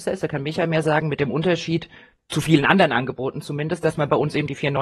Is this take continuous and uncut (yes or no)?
yes